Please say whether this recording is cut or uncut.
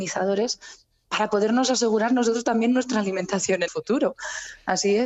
cut